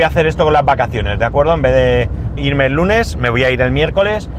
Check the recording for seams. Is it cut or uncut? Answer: cut